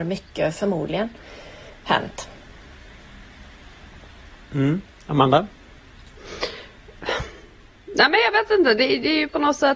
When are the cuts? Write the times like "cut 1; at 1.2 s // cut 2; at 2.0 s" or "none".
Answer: none